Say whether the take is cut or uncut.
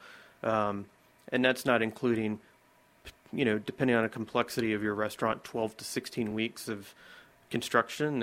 uncut